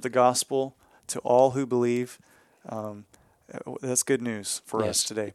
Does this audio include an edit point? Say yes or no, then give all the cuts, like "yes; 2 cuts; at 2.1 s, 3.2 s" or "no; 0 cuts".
no; 0 cuts